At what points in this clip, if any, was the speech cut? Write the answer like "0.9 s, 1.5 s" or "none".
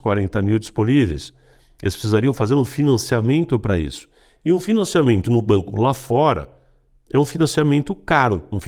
none